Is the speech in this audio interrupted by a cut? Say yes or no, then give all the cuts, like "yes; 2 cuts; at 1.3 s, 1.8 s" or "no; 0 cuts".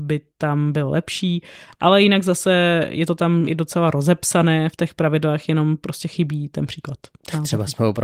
no; 0 cuts